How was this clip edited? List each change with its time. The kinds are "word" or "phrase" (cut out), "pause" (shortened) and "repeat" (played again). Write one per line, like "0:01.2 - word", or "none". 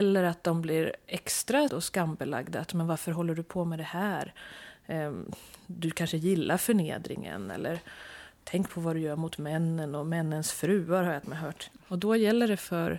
0:01.7 - word
0:11.2 - word